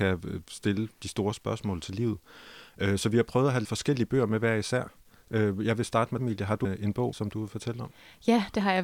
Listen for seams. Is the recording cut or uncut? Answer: cut